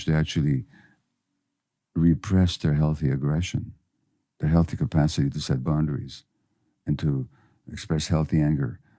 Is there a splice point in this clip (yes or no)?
no